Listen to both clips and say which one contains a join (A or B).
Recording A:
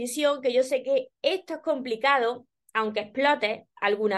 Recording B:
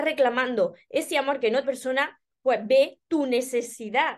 B